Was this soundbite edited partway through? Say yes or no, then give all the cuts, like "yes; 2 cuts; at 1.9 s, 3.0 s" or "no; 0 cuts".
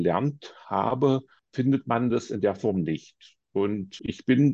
no; 0 cuts